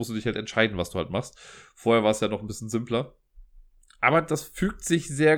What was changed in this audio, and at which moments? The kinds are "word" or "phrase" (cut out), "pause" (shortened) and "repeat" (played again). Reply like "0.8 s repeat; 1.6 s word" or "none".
none